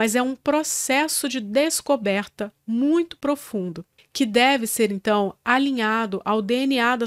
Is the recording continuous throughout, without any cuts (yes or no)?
no